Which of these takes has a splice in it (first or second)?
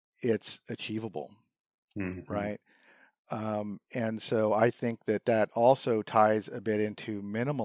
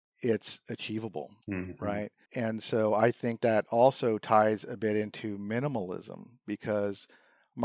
second